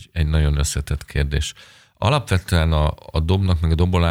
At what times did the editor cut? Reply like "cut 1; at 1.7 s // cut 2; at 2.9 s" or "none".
none